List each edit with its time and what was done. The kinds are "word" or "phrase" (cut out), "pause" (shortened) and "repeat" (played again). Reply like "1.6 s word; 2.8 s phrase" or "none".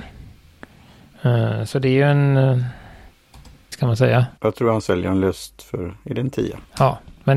3.7 s phrase; 4.4 s pause